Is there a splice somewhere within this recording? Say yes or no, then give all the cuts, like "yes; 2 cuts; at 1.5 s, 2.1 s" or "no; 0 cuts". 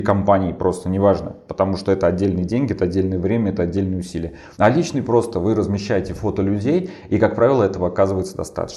yes; 1 cut; at 4.5 s